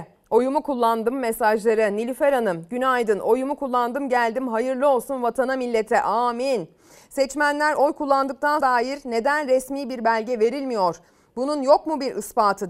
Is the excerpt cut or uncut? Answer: cut